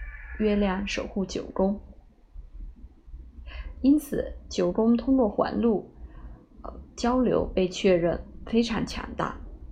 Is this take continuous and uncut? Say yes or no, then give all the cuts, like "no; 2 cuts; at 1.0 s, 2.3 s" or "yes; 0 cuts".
yes; 0 cuts